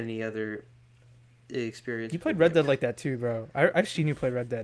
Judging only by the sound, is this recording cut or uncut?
uncut